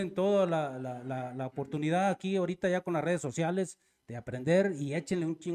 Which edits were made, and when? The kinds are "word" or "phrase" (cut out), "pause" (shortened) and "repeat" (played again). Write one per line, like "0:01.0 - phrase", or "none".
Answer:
none